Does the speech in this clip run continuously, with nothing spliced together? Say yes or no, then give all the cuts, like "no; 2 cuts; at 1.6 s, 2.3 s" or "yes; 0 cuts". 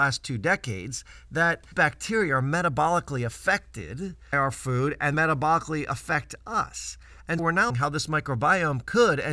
no; 5 cuts; at 1.7 s, 4.3 s, 5.1 s, 7.4 s, 7.7 s